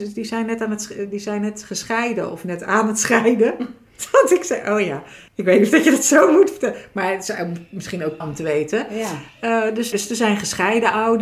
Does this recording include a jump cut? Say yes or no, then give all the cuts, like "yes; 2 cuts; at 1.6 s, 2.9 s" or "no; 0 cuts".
yes; 3 cuts; at 5.3 s, 8.2 s, 9.9 s